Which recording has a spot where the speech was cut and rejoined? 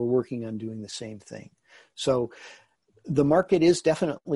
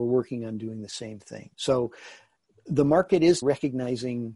second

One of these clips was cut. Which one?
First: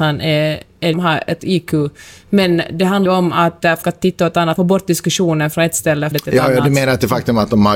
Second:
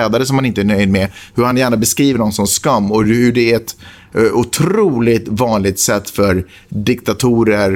first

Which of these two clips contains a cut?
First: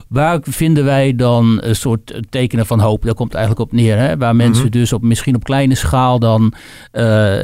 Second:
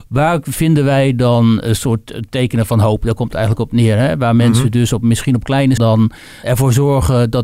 second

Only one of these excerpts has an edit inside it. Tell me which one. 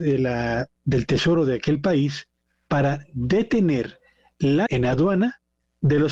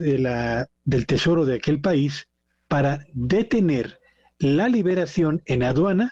first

